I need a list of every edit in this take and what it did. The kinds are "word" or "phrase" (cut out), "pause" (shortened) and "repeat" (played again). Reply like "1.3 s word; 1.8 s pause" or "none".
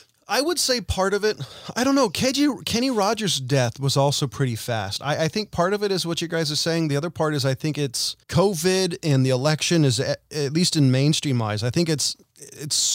8.2 s pause